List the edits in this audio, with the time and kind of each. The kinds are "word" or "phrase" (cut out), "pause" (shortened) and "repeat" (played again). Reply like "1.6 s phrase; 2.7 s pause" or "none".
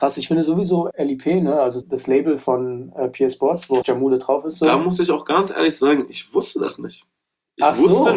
0.9 s word; 1.8 s word; 3.8 s word